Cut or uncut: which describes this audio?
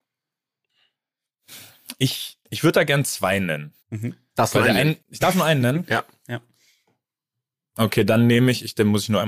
cut